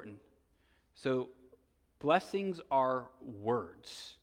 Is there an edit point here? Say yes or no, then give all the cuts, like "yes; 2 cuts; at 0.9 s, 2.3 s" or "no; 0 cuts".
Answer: no; 0 cuts